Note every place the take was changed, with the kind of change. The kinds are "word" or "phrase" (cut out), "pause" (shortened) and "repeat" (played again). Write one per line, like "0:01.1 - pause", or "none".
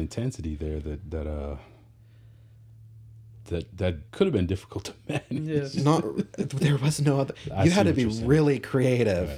0:04.1 - pause